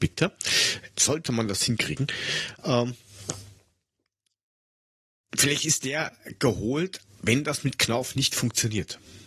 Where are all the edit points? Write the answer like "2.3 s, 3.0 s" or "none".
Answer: 7.2 s